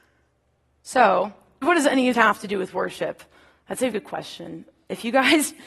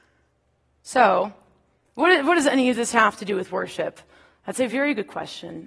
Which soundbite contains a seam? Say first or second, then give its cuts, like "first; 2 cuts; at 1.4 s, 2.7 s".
first; 3 cuts; at 1.6 s, 2.1 s, 3.9 s